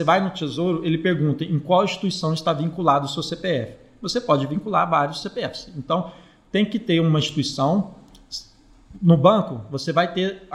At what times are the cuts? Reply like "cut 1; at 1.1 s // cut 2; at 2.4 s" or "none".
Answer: none

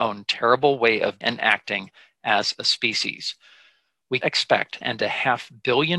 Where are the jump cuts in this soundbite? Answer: cut 1; at 1.2 s // cut 2; at 4.2 s // cut 3; at 4.8 s

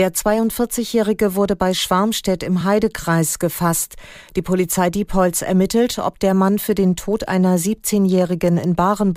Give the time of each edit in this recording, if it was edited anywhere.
none

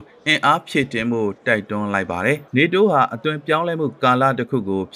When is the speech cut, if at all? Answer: cut 1; at 2.5 s

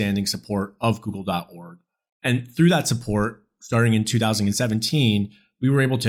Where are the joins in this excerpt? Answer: none

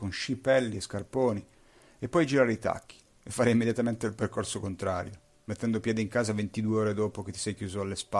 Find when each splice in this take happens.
none

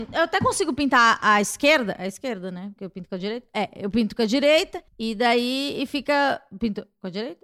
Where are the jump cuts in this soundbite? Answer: cut 1; at 4.9 s

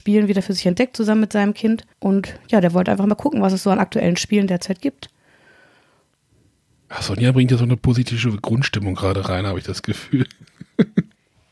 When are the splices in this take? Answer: cut 1; at 1.9 s

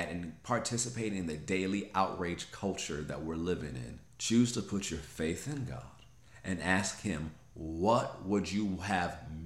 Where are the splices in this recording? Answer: cut 1; at 4.1 s

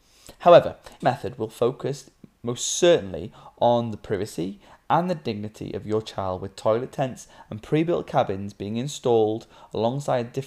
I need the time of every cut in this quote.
cut 1; at 1.0 s

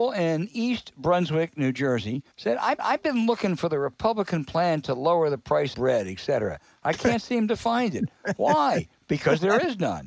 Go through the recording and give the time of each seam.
cut 1; at 2.3 s // cut 2; at 2.8 s // cut 3; at 5.7 s

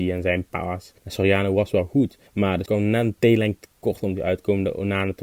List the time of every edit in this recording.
cut 1; at 1.0 s // cut 2; at 2.3 s // cut 3; at 2.7 s

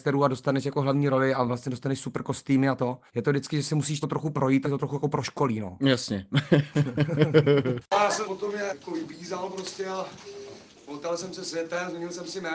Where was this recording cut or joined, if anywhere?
cut 1; at 3.1 s // cut 2; at 4.0 s // cut 3; at 4.6 s // cut 4; at 8.2 s // cut 5; at 8.7 s

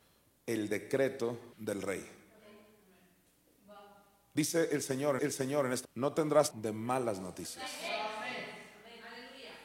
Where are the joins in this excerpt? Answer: cut 1; at 1.5 s // cut 2; at 5.2 s // cut 3; at 5.8 s // cut 4; at 6.5 s

